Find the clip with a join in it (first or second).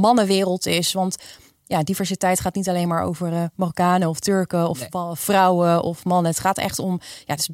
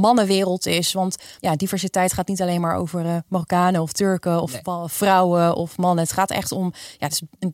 second